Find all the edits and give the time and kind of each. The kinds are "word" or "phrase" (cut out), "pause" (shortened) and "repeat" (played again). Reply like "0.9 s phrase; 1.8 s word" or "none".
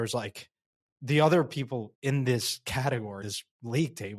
1.9 s word; 3.2 s word